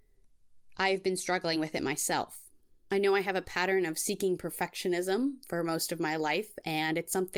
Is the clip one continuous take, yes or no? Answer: yes